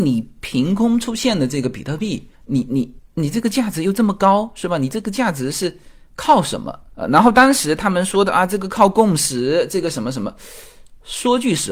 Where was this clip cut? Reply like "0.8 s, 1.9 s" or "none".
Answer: 2.3 s